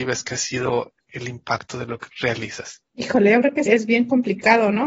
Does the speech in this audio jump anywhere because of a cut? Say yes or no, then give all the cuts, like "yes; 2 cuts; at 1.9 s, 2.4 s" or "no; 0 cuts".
yes; 3 cuts; at 2.1 s, 2.9 s, 3.7 s